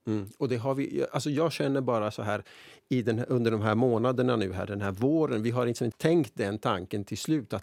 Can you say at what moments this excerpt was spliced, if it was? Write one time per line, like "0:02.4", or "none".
0:05.9

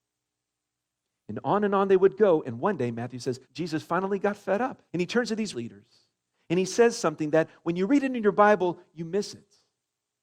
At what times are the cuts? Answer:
0:03.4
0:04.9
0:05.5

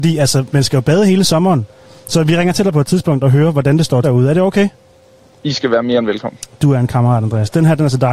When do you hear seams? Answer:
0:02.5
0:04.0

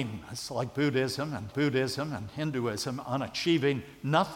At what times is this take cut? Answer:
0:01.5

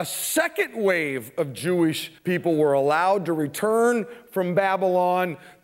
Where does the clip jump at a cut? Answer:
0:02.2

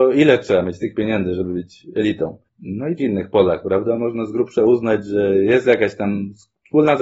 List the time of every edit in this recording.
0:03.0

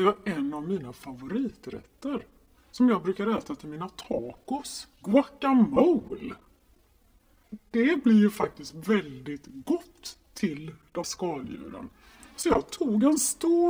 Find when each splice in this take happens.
0:04.9
0:11.0

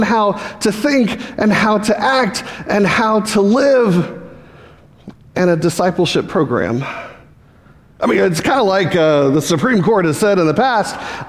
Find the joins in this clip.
none

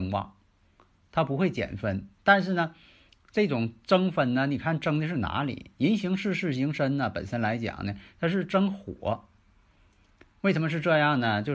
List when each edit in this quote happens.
none

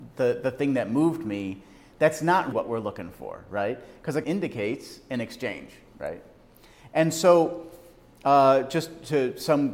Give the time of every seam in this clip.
0:02.5
0:04.2

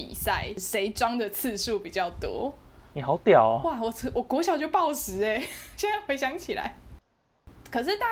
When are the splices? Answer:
none

